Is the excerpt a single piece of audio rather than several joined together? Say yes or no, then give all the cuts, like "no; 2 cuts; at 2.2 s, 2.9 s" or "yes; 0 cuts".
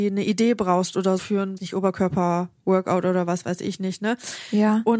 no; 2 cuts; at 1.2 s, 1.6 s